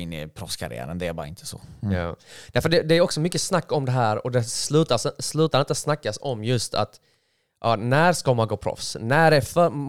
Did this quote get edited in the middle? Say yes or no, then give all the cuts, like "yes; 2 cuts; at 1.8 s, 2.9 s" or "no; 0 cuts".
no; 0 cuts